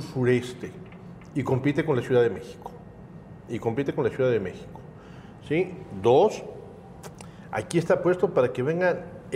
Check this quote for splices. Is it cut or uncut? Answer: uncut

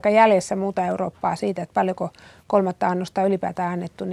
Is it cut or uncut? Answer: uncut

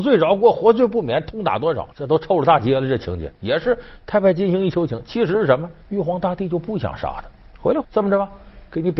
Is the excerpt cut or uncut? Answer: cut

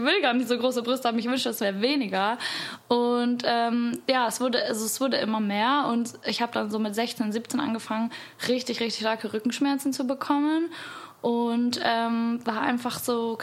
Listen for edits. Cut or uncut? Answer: uncut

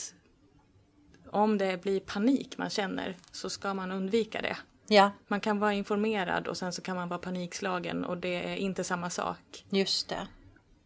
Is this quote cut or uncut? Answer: uncut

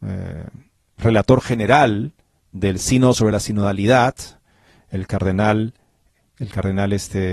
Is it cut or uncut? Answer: uncut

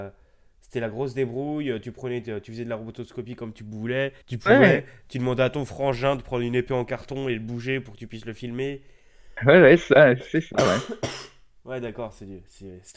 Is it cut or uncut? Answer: cut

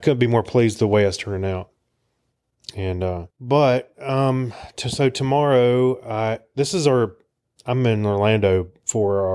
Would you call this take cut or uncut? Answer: cut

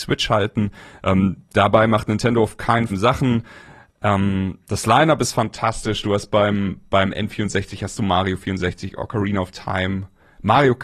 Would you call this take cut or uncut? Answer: cut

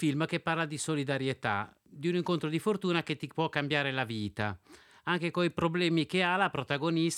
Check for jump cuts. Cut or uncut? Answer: uncut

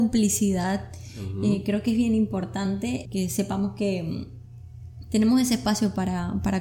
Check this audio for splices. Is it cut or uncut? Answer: cut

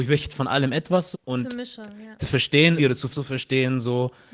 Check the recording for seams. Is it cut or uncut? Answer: cut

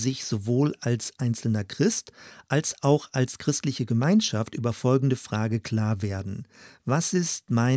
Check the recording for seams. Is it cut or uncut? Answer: uncut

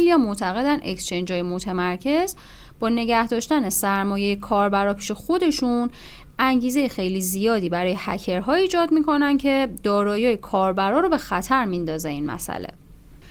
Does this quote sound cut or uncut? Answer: uncut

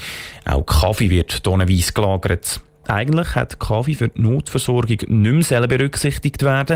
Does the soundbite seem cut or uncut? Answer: uncut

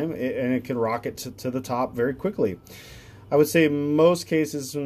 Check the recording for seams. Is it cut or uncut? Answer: uncut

